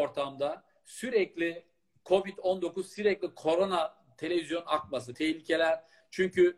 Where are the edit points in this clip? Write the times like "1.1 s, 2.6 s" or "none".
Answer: 5.1 s

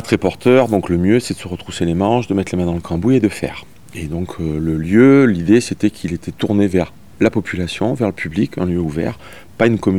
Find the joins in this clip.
none

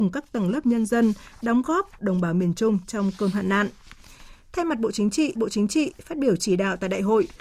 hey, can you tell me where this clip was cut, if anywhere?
2.0 s, 5.4 s

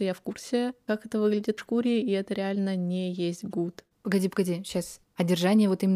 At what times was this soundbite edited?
1.6 s

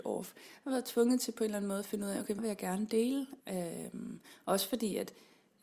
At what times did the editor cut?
2.4 s, 3.4 s

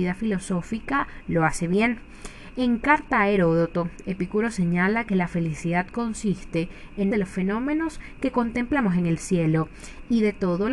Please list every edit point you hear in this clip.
7.1 s

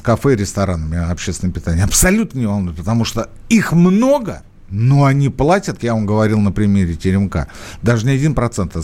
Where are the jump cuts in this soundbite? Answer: 5.8 s

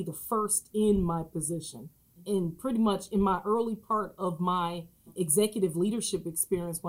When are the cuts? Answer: none

